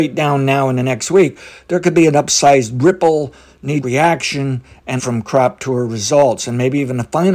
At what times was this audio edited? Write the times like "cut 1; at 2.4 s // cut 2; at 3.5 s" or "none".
cut 1; at 3.8 s // cut 2; at 5.0 s